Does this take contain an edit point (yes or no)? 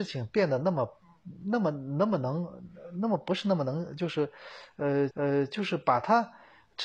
yes